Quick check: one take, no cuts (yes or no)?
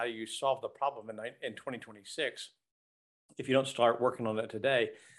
yes